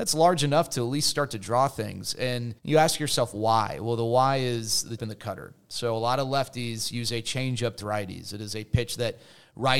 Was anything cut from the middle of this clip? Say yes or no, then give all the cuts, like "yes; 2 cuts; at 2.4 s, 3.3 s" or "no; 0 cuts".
yes; 3 cuts; at 2.6 s, 5.0 s, 7.8 s